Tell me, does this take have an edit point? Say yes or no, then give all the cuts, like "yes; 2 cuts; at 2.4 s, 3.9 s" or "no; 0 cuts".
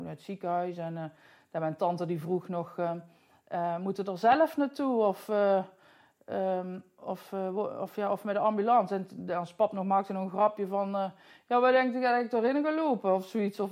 no; 0 cuts